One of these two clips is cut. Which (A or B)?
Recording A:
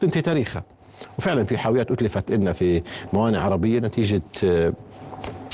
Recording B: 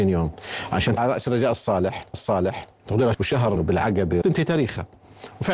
B